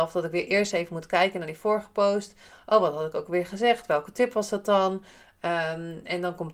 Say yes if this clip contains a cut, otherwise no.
no